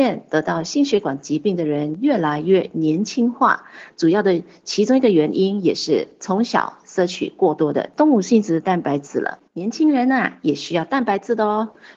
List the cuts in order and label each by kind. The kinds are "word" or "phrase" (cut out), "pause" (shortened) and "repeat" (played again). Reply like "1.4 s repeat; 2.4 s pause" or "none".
9.5 s pause